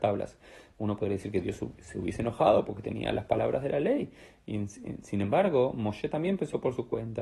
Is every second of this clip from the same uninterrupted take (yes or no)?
yes